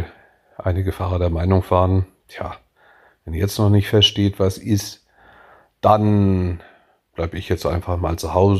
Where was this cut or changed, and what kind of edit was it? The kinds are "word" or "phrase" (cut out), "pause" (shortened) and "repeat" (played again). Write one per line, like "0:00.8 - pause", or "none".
none